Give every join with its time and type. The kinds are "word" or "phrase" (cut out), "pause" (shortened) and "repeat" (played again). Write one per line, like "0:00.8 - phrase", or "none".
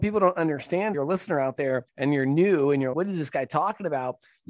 0:00.9 - phrase
0:01.9 - pause
0:02.9 - word